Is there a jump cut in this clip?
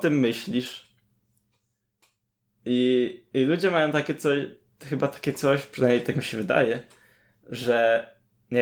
no; 0 cuts

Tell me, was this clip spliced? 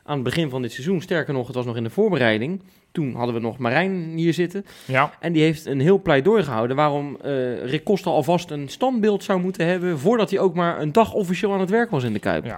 yes; 1 cut; at 5.6 s

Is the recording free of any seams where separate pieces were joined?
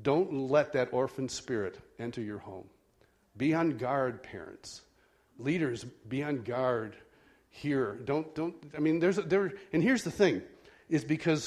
yes; 0 cuts

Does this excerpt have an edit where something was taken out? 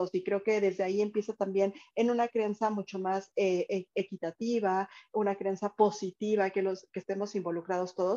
no; 0 cuts

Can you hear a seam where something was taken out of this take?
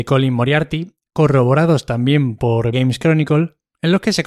yes; 1 cut; at 2.7 s

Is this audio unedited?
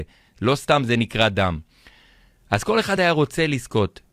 yes; 0 cuts

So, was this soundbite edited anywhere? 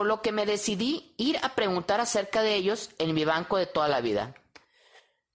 no; 0 cuts

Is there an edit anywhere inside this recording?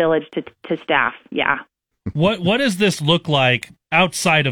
no; 0 cuts

